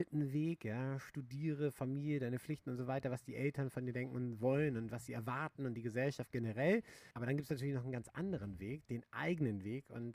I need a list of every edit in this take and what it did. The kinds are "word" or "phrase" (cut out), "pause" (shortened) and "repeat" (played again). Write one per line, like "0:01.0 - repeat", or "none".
0:07.1 - pause